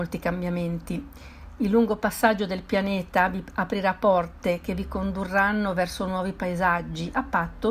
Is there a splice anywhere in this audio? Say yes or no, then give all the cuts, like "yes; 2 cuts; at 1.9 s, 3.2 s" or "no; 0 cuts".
no; 0 cuts